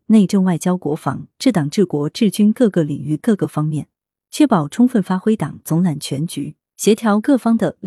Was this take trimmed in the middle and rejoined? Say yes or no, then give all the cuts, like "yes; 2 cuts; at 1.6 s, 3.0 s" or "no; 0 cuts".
no; 0 cuts